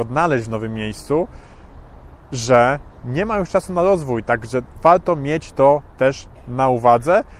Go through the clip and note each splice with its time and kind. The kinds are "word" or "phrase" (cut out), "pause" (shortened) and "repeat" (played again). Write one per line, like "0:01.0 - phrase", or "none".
none